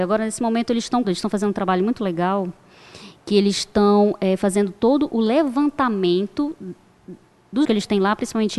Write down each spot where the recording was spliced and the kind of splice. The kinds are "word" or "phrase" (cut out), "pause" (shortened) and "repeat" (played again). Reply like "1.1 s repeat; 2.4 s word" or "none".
1.0 s word; 7.6 s word